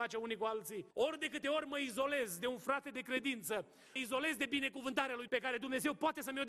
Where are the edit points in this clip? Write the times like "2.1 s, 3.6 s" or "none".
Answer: 0.9 s, 4.0 s, 5.3 s